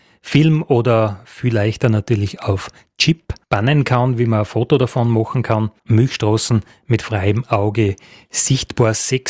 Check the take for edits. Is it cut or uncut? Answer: cut